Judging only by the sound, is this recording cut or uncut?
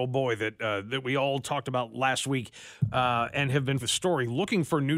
cut